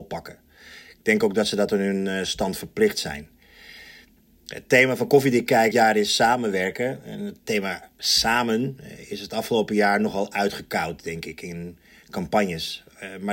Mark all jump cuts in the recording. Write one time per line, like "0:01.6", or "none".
0:05.7
0:07.4